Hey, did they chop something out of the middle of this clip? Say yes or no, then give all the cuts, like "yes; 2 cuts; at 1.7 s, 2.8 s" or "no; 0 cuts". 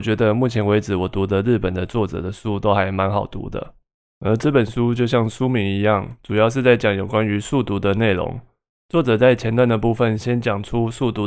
no; 0 cuts